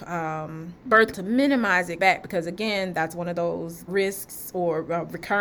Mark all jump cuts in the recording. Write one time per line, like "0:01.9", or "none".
0:01.1
0:02.0
0:03.9